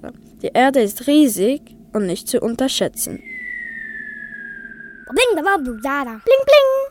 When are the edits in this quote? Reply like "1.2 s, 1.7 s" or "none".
none